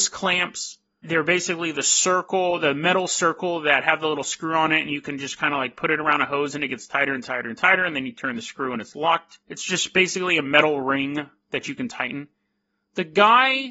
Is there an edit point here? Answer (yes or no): yes